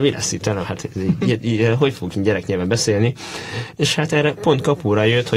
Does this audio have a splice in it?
no; 0 cuts

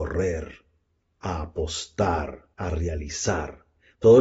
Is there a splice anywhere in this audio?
yes; 1 cut; at 2.5 s

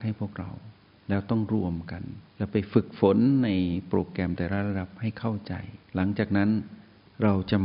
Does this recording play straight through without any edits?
no; 2 cuts; at 2.3 s, 5.8 s

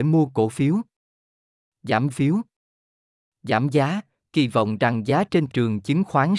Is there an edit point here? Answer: yes; 2 cuts; at 2.1 s, 5.5 s

